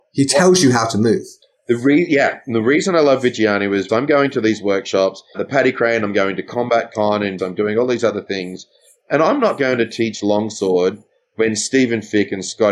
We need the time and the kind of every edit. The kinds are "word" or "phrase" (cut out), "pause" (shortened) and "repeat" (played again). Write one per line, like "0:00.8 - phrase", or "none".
0:03.9 - word
0:05.3 - word
0:07.4 - word